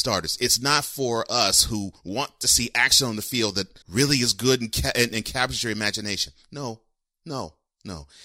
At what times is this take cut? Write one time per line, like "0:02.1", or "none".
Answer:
0:03.8